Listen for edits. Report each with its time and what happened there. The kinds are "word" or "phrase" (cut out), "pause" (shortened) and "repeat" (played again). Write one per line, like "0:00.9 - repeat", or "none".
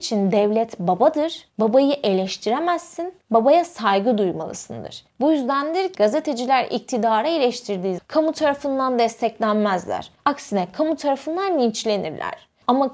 0:05.9 - word
0:08.0 - word

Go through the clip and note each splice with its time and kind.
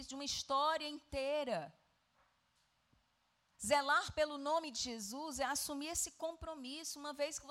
none

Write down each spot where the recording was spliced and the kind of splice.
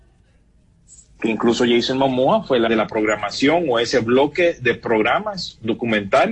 0:02.7 - phrase

